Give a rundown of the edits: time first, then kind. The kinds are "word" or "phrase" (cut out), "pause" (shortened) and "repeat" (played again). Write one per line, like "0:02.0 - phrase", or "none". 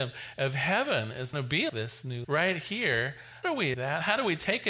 0:01.3 - word
0:01.7 - word
0:02.2 - word
0:03.4 - word
0:03.7 - word